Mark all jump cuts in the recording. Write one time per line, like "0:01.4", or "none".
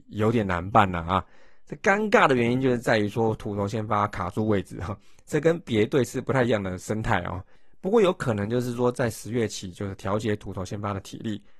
none